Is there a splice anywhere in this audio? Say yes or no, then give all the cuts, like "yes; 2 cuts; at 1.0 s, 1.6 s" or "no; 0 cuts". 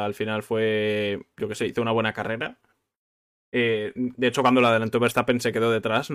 no; 0 cuts